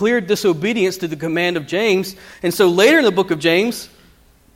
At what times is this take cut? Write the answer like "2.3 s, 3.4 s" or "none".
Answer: none